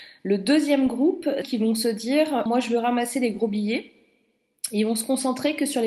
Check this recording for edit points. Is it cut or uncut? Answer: cut